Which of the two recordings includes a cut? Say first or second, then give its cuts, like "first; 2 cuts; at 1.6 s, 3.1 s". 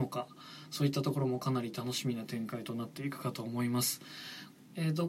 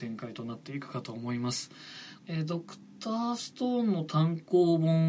second; 1 cut; at 2.2 s